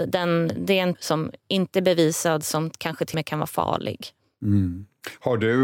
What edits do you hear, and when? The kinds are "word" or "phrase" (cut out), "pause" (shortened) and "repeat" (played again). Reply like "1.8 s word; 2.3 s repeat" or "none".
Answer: 0.9 s word; 3.1 s word